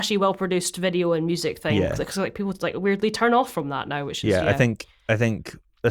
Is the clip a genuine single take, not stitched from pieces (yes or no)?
yes